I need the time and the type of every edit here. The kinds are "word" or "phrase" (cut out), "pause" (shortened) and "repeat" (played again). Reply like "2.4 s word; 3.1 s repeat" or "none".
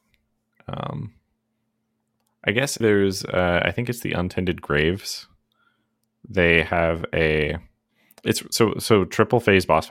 2.8 s word